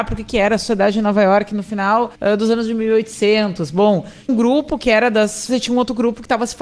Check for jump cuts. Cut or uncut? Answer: cut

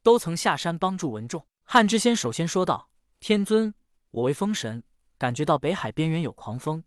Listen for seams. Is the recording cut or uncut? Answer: uncut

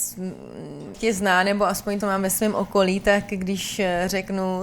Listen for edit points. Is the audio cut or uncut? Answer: cut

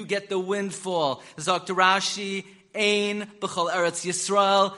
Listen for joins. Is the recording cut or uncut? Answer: uncut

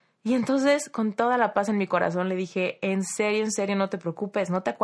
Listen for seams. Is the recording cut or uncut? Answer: uncut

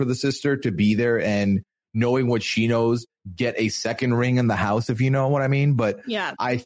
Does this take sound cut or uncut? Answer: uncut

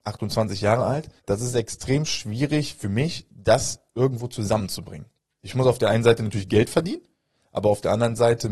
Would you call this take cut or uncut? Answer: uncut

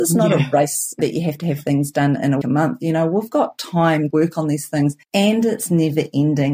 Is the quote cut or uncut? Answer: cut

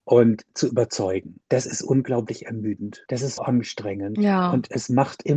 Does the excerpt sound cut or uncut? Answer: cut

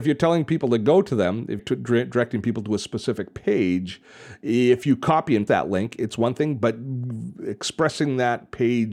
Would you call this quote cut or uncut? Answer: cut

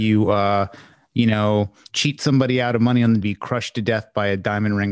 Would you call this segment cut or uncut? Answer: cut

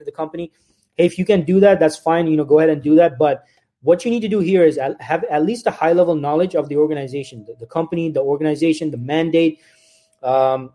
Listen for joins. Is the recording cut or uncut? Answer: uncut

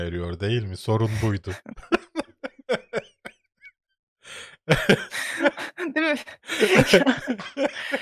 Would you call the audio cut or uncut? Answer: uncut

